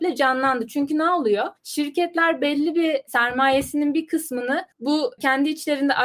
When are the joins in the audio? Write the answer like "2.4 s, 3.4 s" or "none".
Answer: 4.7 s